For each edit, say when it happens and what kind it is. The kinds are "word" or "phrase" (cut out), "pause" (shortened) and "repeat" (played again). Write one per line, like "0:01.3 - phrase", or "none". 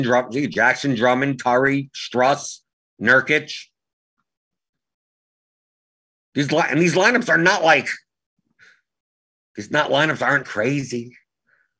0:10.4 - word